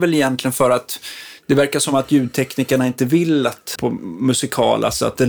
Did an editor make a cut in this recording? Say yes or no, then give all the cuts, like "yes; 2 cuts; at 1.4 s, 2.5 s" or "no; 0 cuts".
yes; 1 cut; at 3.7 s